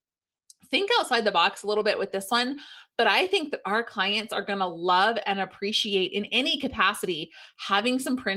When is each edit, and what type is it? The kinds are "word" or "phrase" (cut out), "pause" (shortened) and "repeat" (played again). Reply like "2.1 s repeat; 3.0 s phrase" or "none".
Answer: none